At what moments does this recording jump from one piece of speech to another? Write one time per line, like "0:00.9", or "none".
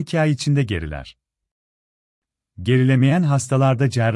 none